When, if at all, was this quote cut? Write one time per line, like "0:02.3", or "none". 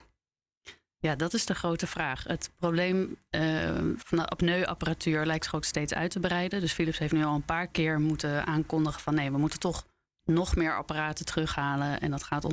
none

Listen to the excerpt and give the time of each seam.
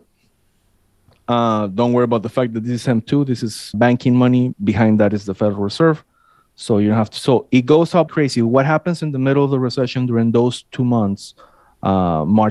0:03.7
0:04.5
0:08.1

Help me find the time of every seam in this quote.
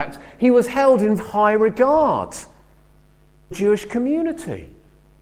0:01.2
0:03.5

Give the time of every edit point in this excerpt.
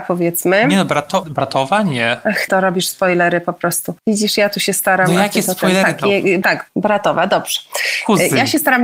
0:01.2
0:02.5
0:04.0
0:06.4

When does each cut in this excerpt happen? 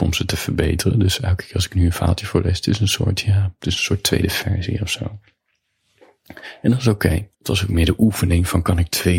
0:07.3

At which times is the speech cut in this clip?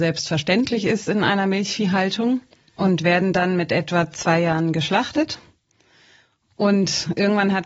none

